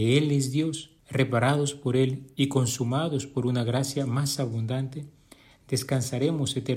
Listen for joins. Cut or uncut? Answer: cut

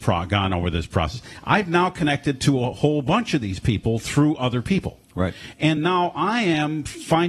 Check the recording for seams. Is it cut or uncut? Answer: uncut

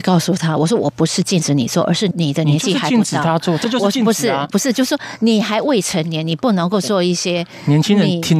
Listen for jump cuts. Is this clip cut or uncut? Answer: uncut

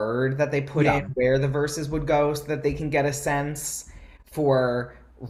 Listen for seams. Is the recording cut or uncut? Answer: uncut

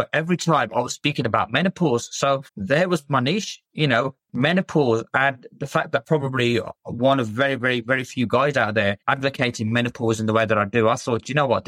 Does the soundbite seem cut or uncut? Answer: cut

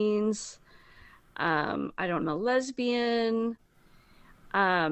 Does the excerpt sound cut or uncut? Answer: cut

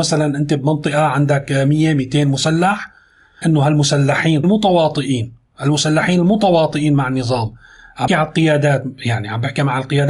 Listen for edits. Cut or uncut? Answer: cut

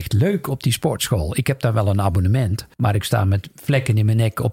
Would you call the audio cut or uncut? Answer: cut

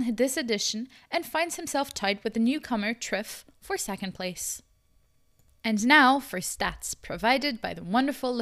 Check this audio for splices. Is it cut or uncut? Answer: uncut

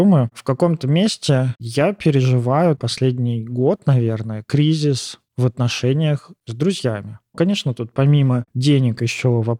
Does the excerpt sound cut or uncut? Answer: uncut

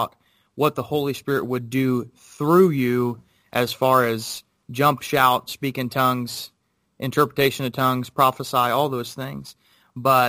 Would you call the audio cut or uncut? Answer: uncut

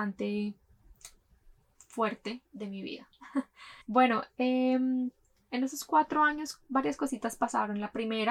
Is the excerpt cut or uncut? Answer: cut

